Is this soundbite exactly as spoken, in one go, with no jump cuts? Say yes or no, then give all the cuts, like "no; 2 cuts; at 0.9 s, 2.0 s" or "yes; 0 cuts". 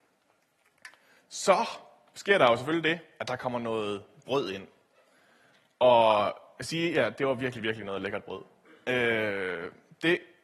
yes; 0 cuts